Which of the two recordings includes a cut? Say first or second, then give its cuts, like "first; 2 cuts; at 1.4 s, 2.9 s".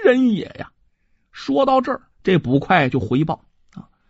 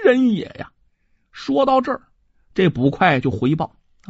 first; 1 cut; at 2.1 s